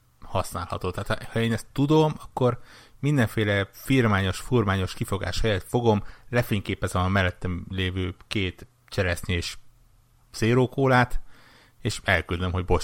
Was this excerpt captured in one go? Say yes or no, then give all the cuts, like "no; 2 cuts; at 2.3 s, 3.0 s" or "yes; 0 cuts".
yes; 0 cuts